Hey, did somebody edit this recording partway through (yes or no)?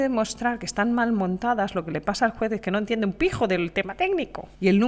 no